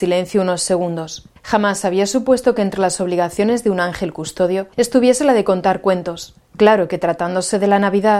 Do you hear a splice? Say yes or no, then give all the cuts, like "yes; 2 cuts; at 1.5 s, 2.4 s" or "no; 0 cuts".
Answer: yes; 3 cuts; at 1.4 s, 4.7 s, 6.4 s